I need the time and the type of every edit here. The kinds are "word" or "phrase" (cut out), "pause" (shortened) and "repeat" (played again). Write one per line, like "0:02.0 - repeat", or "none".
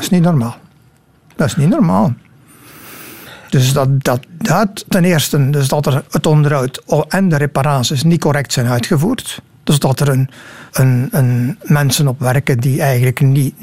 0:06.1 - pause
0:10.7 - pause